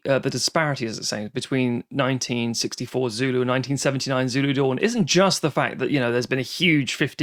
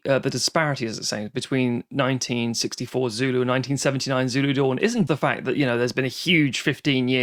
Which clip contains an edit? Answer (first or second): second